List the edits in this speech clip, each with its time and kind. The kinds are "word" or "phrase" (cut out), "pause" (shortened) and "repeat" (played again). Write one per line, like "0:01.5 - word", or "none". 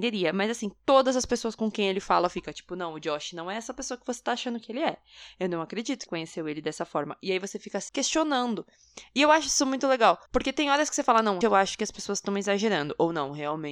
0:06.1 - phrase
0:07.9 - word
0:10.3 - pause
0:11.4 - word